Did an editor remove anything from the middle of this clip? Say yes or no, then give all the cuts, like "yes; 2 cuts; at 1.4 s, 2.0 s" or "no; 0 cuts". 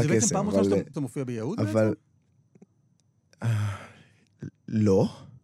yes; 1 cut; at 0.9 s